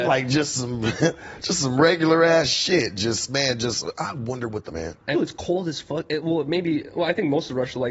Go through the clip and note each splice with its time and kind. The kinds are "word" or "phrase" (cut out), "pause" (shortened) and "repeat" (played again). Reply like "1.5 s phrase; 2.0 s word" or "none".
4.7 s phrase; 5.1 s word